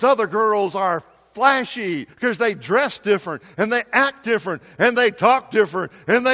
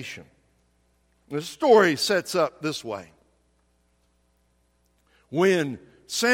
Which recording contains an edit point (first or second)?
first